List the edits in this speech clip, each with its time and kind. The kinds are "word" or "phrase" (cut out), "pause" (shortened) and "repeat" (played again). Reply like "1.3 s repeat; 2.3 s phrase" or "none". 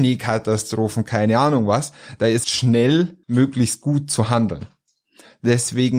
2.4 s phrase; 3.2 s pause